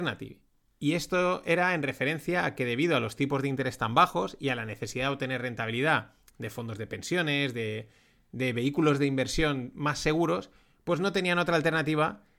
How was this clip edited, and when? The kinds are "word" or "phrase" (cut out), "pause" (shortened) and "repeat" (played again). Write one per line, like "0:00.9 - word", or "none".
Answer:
none